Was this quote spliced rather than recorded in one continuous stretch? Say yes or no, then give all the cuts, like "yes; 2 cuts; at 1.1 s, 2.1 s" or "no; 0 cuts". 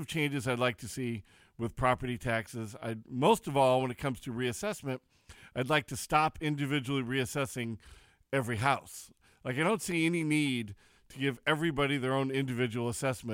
no; 0 cuts